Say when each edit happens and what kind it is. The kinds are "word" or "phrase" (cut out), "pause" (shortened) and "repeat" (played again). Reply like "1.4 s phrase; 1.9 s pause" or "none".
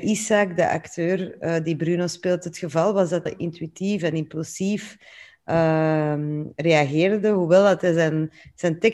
3.3 s phrase